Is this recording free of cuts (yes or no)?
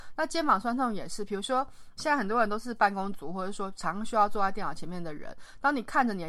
no